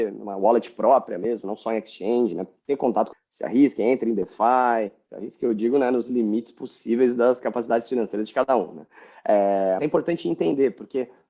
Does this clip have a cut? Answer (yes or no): yes